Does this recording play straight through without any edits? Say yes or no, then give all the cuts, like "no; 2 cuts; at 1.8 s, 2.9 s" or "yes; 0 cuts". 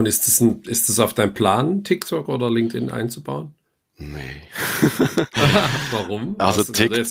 yes; 0 cuts